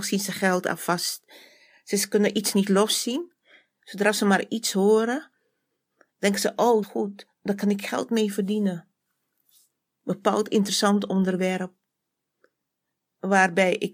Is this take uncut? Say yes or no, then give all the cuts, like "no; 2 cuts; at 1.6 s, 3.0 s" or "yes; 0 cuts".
no; 1 cut; at 6.8 s